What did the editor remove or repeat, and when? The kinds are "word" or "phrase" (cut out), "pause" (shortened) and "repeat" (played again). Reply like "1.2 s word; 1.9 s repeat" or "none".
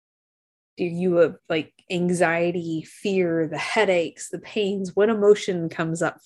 1.4 s pause